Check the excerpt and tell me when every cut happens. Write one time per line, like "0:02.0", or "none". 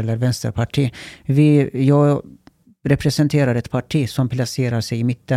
none